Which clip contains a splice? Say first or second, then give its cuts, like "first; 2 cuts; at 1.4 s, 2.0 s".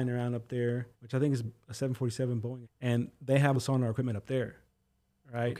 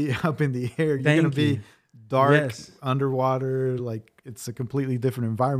first; 4 cuts; at 0.9 s, 1.4 s, 2.6 s, 3.5 s